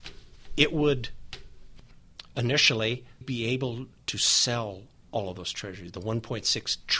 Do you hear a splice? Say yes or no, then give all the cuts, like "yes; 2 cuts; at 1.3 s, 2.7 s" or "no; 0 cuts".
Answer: yes; 1 cut; at 3.2 s